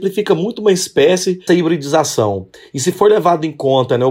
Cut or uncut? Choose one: cut